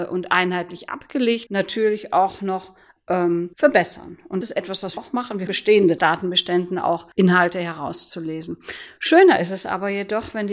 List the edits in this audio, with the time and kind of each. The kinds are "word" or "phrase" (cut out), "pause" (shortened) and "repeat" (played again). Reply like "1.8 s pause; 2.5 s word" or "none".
1.5 s phrase; 3.5 s pause; 4.4 s word; 5.0 s word; 5.5 s word; 6.0 s phrase; 7.1 s pause

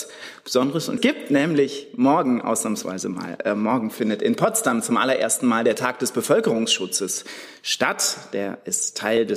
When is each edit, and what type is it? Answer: 1.0 s word

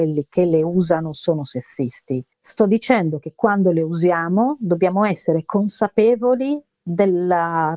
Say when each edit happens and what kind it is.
2.3 s pause

